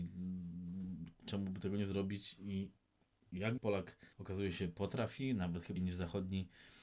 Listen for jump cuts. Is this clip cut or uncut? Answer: cut